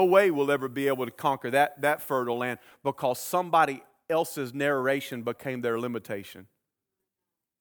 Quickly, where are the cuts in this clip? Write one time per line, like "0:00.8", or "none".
0:01.7